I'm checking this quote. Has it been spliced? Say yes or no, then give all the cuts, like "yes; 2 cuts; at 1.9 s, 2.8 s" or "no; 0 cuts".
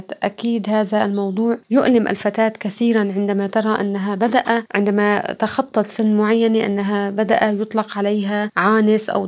no; 0 cuts